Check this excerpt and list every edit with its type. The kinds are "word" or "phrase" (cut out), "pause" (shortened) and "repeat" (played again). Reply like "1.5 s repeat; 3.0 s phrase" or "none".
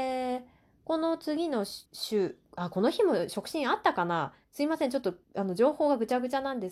1.9 s pause; 4.4 s pause; 5.2 s pause